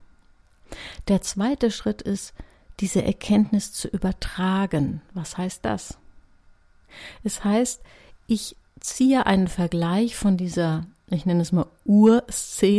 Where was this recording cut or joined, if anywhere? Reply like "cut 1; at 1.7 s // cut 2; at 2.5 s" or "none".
none